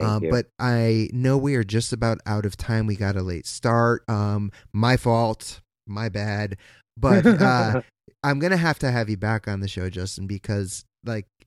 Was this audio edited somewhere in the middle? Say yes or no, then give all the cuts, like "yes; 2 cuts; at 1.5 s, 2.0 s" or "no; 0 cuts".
no; 0 cuts